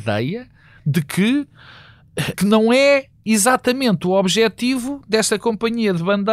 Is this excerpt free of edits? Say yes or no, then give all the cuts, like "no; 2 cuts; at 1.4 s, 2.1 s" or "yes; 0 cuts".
no; 1 cut; at 2.3 s